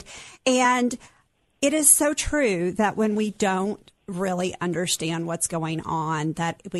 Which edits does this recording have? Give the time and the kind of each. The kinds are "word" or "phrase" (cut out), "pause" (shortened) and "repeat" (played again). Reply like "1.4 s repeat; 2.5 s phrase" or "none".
4.0 s pause